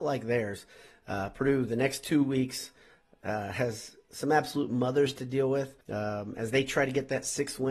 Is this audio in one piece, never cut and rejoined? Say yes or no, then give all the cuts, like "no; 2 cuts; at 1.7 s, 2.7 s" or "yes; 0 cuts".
no; 1 cut; at 5.8 s